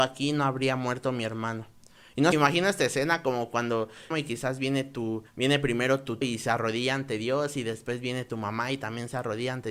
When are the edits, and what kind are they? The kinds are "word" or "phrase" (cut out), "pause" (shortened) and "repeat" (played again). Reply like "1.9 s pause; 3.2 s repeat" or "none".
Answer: 2.3 s word; 4.1 s phrase; 5.3 s pause; 6.2 s word